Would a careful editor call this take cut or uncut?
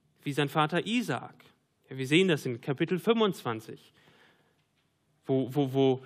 uncut